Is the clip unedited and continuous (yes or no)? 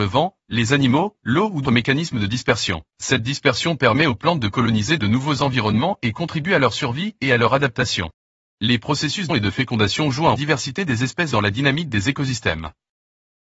no